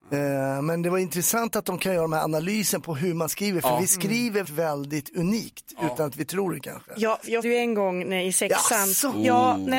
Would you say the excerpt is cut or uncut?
cut